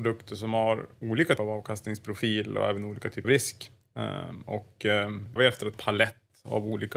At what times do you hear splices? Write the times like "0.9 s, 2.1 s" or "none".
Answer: 1.4 s, 3.2 s, 5.4 s, 5.7 s